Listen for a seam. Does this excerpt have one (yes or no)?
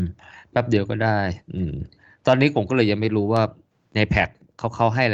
yes